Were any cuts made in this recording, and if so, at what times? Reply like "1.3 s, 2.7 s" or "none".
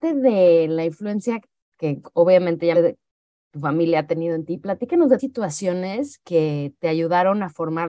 2.7 s, 5.2 s